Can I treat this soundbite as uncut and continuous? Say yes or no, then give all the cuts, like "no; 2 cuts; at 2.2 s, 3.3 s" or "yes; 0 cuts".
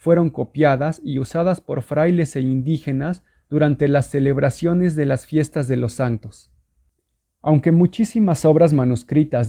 yes; 0 cuts